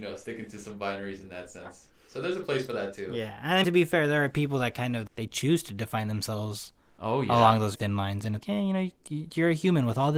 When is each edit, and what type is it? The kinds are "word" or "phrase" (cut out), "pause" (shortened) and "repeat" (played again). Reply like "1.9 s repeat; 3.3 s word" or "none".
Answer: 3.6 s word; 5.1 s word; 7.7 s word; 8.4 s word